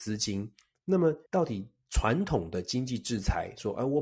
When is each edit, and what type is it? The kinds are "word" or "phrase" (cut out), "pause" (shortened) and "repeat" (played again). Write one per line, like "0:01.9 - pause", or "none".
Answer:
0:01.3 - pause